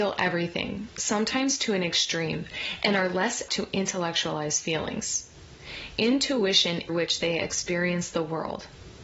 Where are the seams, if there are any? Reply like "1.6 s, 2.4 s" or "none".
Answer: 3.5 s, 6.9 s